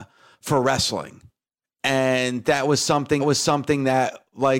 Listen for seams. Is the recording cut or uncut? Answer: cut